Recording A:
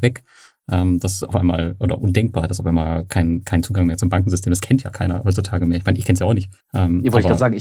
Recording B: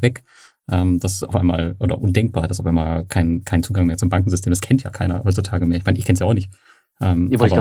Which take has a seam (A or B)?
A